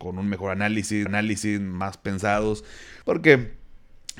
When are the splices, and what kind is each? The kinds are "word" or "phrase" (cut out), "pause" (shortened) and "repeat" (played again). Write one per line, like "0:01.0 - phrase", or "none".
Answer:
0:01.1 - repeat
0:03.0 - pause